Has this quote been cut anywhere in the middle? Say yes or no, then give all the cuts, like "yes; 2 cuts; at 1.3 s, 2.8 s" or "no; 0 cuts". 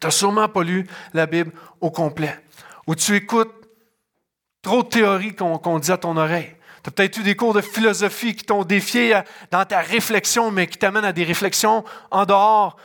no; 0 cuts